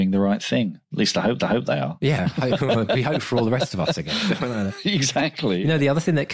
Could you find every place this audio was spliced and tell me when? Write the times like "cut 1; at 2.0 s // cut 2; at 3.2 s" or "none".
cut 1; at 1.4 s